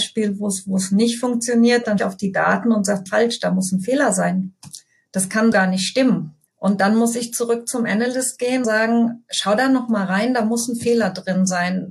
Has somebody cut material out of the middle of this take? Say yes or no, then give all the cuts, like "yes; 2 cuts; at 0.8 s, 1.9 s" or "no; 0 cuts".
yes; 5 cuts; at 2.0 s, 3.1 s, 5.5 s, 6.5 s, 8.6 s